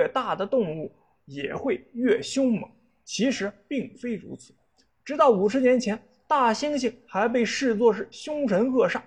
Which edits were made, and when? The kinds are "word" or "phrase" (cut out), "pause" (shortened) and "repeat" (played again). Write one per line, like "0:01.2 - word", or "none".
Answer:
none